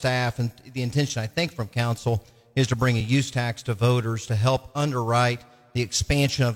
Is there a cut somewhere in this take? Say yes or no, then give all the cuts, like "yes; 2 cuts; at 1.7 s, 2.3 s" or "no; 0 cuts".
no; 0 cuts